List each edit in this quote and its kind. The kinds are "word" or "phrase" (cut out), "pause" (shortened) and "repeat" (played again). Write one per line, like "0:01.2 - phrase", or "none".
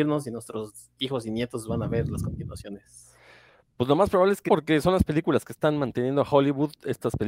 0:04.5 - word